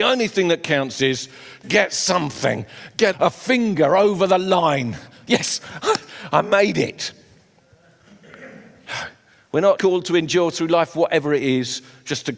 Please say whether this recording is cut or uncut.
cut